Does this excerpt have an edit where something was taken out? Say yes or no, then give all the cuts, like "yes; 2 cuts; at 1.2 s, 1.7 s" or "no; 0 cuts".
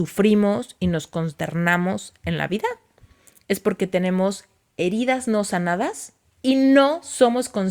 no; 0 cuts